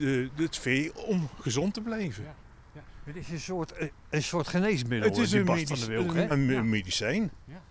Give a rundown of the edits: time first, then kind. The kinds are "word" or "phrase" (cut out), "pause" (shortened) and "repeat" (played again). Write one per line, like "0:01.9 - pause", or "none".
0:06.3 - word